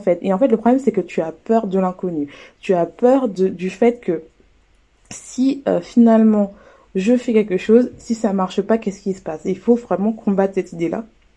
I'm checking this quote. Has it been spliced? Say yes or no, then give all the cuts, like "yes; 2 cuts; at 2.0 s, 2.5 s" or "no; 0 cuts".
no; 0 cuts